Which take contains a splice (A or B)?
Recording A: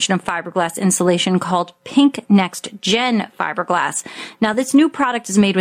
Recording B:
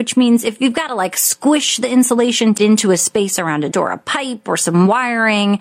B